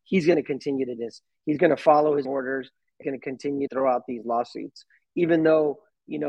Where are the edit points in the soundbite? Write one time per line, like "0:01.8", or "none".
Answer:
0:01.0
0:02.3
0:03.0
0:03.7

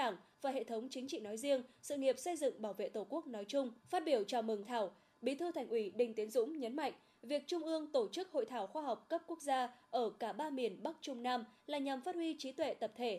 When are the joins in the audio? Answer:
0:03.8
0:04.6

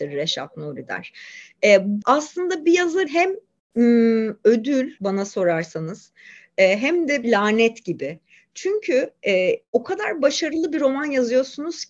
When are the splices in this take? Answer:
0:02.0
0:03.1
0:05.0
0:07.2

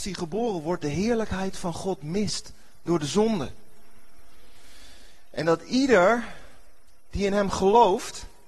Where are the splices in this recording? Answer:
none

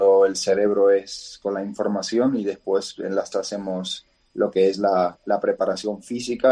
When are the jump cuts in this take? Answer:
0:01.4
0:03.3

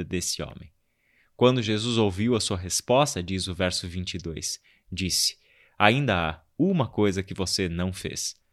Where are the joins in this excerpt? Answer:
none

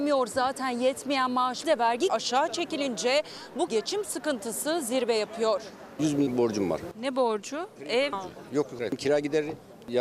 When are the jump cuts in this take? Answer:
0:01.6
0:02.1
0:03.7
0:06.3
0:08.1
0:08.8

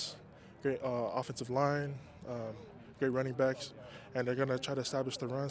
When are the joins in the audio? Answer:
none

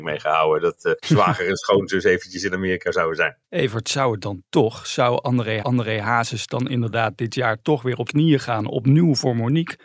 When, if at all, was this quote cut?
0:01.0
0:03.4
0:05.6
0:08.1

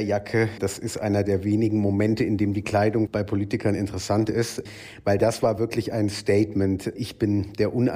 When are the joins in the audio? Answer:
none

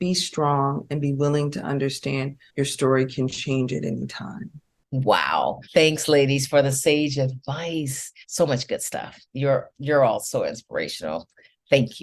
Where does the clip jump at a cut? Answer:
0:02.5
0:05.6
0:08.2
0:09.2

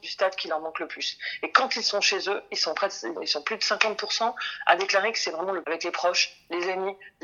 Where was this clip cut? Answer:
0:03.2
0:05.6

